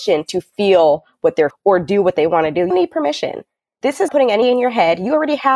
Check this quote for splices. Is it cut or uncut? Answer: cut